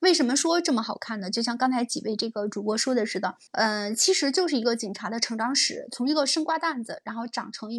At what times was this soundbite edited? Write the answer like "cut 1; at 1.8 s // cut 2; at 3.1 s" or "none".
cut 1; at 3.5 s